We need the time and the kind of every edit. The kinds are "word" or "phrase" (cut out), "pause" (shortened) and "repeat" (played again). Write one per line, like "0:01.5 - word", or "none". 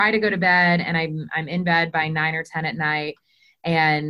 none